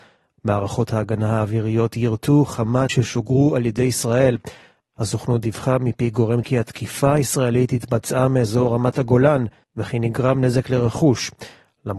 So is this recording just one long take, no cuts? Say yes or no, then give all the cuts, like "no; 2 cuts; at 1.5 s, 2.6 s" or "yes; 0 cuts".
no; 3 cuts; at 2.9 s, 6.4 s, 9.6 s